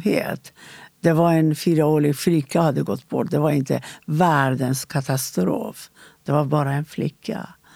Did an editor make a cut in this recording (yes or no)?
no